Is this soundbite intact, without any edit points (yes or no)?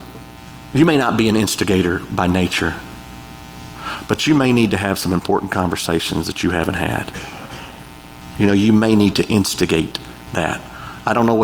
yes